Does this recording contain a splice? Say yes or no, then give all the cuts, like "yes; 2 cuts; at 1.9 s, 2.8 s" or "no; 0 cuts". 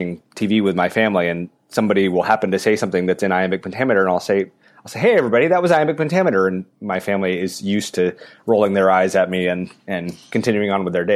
no; 0 cuts